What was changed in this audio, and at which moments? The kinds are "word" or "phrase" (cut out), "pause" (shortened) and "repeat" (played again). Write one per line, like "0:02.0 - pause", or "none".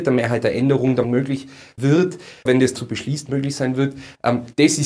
0:01.0 - word
0:01.8 - word
0:02.5 - word
0:02.8 - word